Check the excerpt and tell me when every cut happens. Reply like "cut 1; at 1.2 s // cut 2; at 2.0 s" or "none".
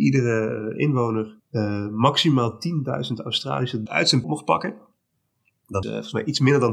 cut 1; at 1.4 s // cut 2; at 3.9 s // cut 3; at 4.2 s // cut 4; at 5.8 s